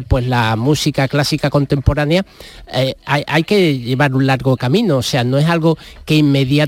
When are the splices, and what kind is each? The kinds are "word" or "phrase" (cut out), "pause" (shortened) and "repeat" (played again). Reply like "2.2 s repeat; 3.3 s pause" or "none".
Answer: none